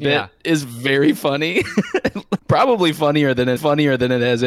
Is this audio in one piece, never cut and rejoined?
no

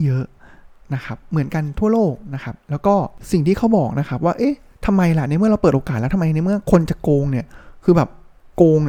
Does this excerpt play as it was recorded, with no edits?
yes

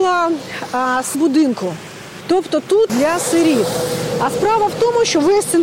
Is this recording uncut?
no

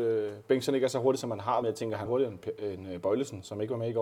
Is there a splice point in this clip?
yes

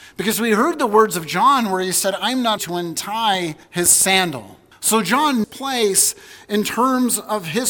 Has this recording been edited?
yes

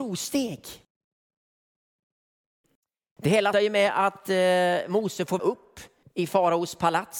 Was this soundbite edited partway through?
yes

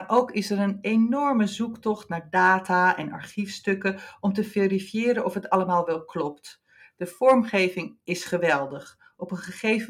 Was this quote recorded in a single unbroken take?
yes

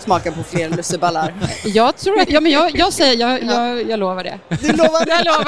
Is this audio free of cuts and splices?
no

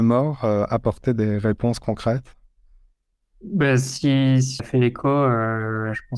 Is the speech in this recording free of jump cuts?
no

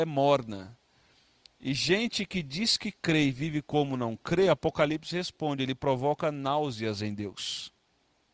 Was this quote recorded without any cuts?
yes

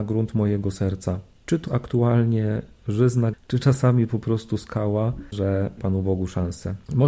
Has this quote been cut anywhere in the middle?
yes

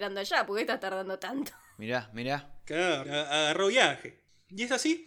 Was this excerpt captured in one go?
no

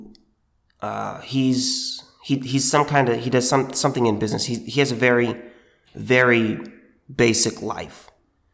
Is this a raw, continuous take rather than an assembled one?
yes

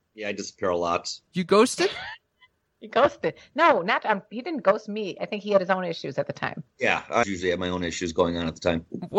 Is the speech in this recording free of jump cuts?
no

